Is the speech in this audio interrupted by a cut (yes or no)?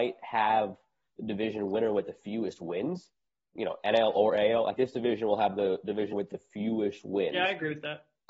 yes